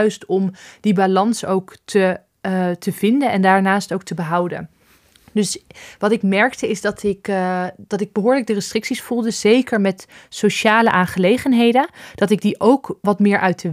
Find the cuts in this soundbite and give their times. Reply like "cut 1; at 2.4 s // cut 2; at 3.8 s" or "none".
none